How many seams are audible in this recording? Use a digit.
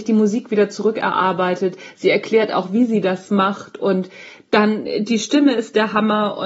0